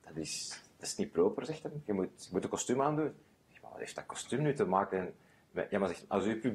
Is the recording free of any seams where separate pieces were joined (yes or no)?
yes